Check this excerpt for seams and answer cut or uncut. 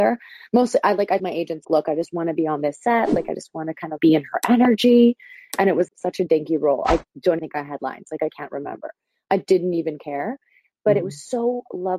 cut